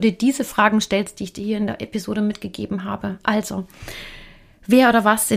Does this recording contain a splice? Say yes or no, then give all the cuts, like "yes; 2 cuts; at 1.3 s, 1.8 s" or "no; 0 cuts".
no; 0 cuts